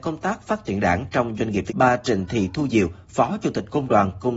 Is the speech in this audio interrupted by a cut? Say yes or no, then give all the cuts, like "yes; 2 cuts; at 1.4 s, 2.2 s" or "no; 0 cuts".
yes; 1 cut; at 1.7 s